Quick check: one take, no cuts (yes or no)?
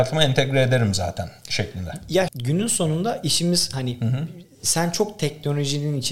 no